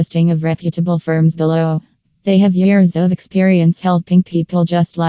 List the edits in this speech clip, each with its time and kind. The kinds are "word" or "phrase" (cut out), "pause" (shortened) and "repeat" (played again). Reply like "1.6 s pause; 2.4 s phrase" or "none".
none